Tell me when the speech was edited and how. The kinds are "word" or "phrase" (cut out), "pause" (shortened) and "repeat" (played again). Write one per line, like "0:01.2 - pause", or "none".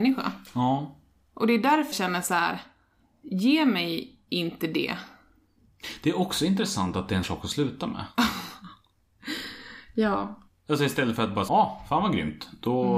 0:01.9 - word
0:07.2 - word
0:10.5 - pause
0:11.5 - word